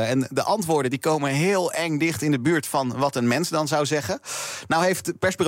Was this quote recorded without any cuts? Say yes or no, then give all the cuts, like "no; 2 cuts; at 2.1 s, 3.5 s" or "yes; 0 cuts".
yes; 0 cuts